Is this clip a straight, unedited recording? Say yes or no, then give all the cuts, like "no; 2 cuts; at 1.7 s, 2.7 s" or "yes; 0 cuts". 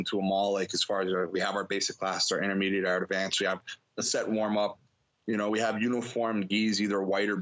yes; 0 cuts